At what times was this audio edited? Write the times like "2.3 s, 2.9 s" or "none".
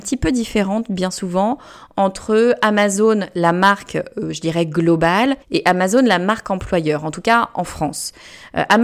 5.4 s